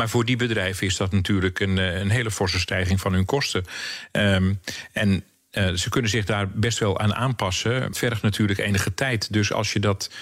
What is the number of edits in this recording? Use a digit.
1